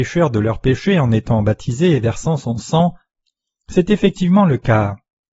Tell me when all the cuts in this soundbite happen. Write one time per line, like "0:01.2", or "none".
none